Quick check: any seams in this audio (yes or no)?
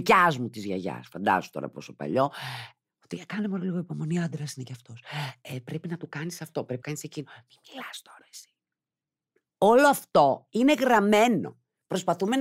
yes